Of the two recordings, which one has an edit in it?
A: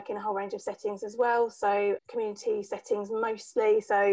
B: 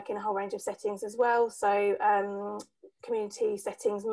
A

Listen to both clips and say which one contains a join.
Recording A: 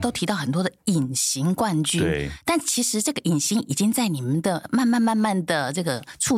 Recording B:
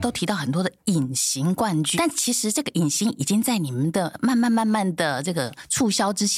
B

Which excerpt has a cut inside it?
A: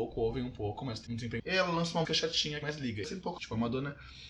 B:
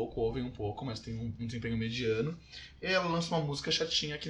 A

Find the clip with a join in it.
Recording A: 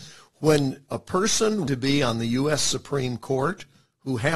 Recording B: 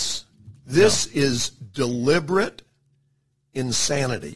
A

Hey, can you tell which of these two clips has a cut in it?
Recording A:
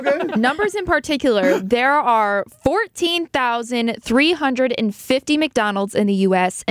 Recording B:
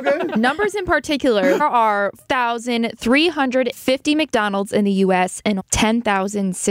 B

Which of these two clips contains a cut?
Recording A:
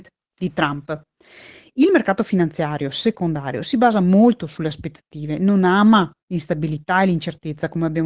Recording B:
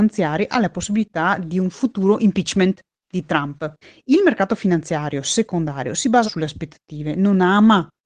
B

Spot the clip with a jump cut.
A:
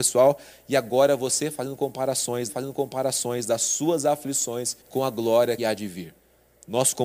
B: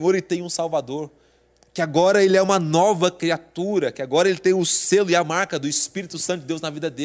A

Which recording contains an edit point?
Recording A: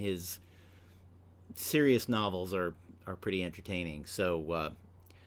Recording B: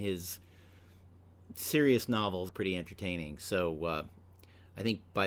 B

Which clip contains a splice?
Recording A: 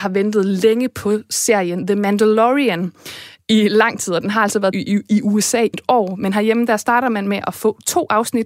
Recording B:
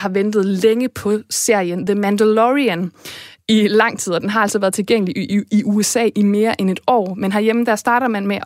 A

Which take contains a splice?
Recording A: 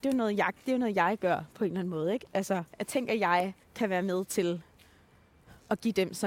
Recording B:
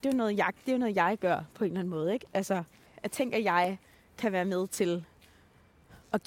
A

